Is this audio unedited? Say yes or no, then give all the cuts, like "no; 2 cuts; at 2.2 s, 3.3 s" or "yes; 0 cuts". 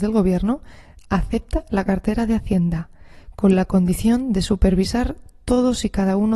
yes; 0 cuts